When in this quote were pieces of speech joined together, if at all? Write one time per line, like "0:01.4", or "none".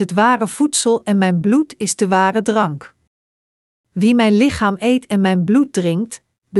none